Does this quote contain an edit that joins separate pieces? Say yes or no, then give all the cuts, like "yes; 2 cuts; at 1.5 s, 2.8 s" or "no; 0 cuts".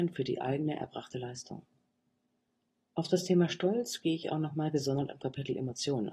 no; 0 cuts